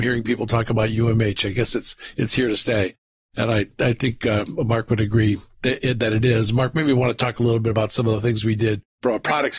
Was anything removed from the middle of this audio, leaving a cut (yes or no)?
no